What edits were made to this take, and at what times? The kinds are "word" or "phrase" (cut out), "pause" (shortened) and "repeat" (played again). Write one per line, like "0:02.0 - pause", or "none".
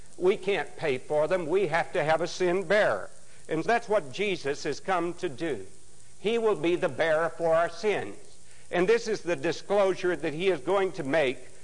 0:03.6 - word

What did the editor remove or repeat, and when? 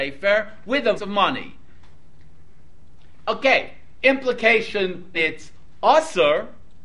0:01.0 - phrase
0:05.1 - word

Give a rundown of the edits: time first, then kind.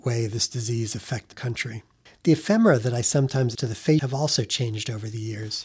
0:01.3 - word
0:02.1 - pause
0:03.5 - word
0:04.0 - word

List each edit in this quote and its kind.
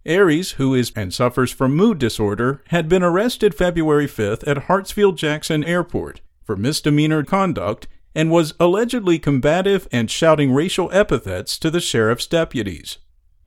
0:00.9 - word
0:05.6 - word
0:07.2 - word

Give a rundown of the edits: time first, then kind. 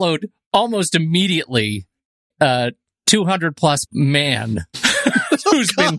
0:02.3 - word
0:03.9 - word

